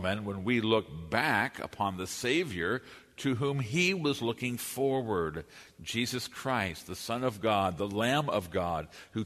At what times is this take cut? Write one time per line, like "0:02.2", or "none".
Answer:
none